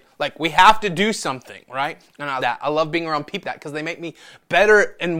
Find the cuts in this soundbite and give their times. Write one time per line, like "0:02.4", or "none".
0:02.4
0:03.4